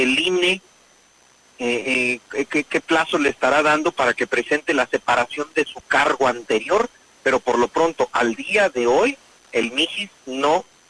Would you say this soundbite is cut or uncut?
uncut